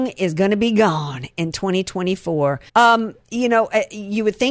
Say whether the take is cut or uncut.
cut